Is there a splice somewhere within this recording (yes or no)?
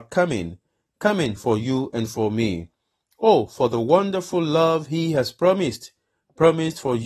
no